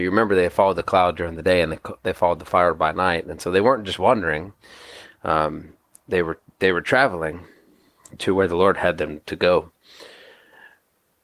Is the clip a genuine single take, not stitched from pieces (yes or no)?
yes